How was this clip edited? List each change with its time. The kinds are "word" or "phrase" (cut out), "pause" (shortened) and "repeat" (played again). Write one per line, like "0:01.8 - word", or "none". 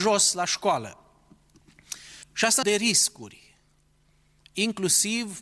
0:02.2 - pause
0:02.6 - phrase